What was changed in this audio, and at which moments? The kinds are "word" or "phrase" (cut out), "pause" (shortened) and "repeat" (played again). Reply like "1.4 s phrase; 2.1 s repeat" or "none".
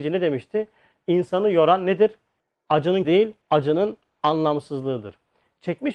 3.0 s word; 3.4 s pause